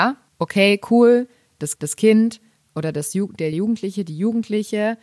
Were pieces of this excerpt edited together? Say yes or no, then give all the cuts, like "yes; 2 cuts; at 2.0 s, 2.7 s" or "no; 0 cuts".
yes; 2 cuts; at 1.8 s, 3.5 s